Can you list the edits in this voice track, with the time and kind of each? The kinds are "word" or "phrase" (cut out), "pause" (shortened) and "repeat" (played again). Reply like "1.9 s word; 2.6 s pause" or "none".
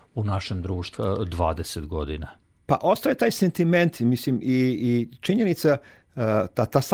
1.0 s phrase; 2.4 s pause